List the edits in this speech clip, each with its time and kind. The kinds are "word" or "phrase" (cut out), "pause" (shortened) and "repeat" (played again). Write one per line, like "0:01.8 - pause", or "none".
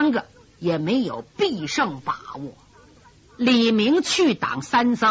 none